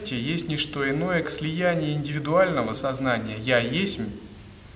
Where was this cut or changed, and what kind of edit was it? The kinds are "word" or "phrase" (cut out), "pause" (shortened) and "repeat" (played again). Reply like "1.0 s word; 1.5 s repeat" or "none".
1.2 s word; 2.7 s word

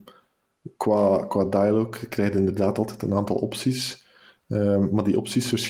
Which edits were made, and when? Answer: none

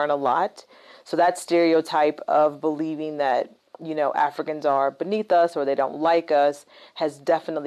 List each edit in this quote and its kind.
none

